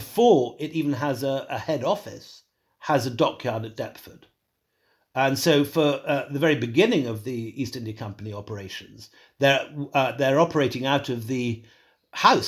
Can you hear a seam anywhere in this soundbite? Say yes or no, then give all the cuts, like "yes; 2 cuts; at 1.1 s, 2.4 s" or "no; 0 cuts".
no; 0 cuts